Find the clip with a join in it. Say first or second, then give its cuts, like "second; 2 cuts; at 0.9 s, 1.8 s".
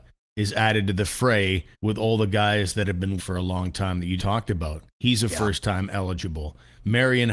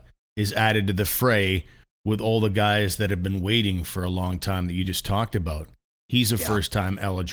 first; 4 cuts; at 1.7 s, 3.2 s, 4.2 s, 4.9 s